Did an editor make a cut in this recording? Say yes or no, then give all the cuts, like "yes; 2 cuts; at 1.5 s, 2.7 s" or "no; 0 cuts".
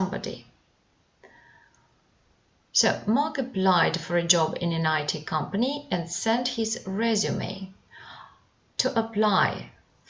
no; 0 cuts